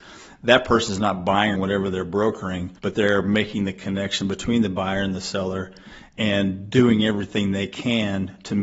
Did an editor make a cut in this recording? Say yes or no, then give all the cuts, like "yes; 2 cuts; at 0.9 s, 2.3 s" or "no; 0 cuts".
yes; 2 cuts; at 1.5 s, 2.8 s